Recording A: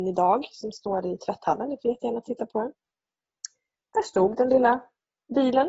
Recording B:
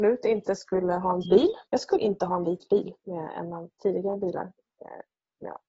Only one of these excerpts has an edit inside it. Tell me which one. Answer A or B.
B